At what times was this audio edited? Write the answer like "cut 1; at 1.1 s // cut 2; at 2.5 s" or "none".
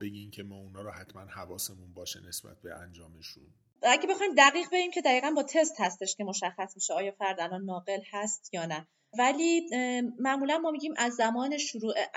none